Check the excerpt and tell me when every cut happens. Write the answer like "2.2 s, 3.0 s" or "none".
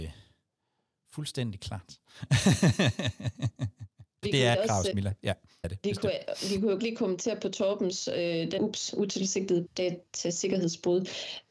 4.2 s, 4.5 s, 4.9 s, 5.6 s, 6.8 s, 8.6 s, 9.7 s